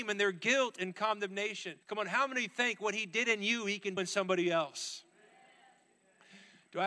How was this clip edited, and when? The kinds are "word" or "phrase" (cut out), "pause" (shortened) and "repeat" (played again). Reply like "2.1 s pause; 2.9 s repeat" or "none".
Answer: 1.8 s pause; 4.0 s word

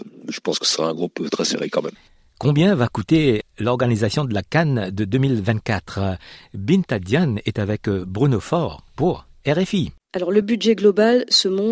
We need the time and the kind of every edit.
none

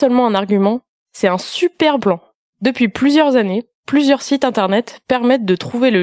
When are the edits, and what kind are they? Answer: 2.0 s word

